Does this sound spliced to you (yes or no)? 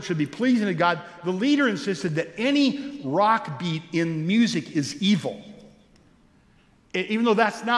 no